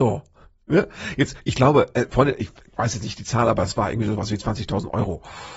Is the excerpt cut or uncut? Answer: uncut